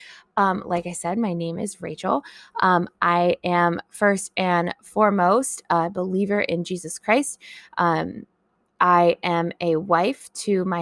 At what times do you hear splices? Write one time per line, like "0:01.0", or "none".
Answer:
none